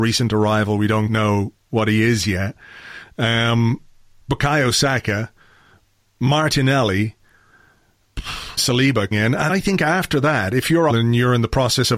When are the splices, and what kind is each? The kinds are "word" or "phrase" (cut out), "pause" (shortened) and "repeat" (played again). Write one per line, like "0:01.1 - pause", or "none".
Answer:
0:01.1 - word
0:08.6 - word
0:09.1 - word
0:09.5 - word
0:10.9 - word